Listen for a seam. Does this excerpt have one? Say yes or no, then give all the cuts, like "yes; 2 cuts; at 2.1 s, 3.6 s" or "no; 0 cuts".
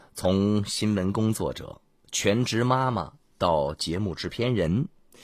no; 0 cuts